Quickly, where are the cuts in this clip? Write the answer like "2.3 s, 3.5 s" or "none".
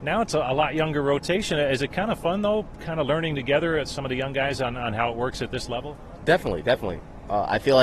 none